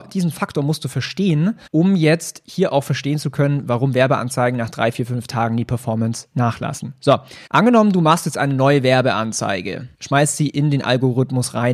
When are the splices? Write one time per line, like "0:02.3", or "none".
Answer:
0:01.7
0:07.5
0:09.9